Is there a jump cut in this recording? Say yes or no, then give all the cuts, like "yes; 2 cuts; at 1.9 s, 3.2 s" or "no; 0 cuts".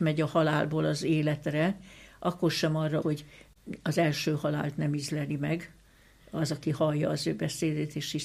yes; 1 cut; at 3.0 s